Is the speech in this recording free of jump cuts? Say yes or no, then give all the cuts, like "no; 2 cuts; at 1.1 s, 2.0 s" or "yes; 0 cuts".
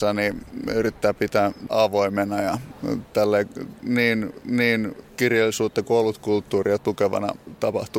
no; 2 cuts; at 1.7 s, 4.4 s